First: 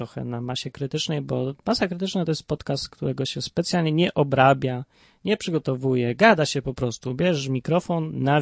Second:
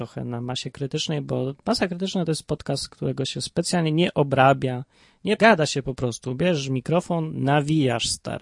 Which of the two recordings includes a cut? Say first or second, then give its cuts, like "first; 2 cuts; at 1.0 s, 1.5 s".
second; 1 cut; at 5.4 s